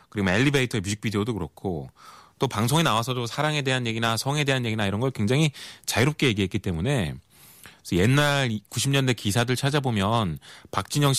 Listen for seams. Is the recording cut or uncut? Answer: uncut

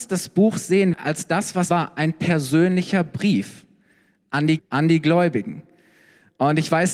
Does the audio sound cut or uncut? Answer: cut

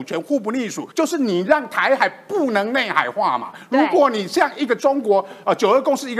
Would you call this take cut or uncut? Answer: cut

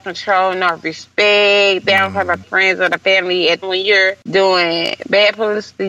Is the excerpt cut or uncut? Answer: cut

